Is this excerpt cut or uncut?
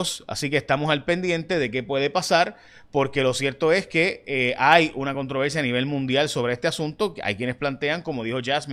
uncut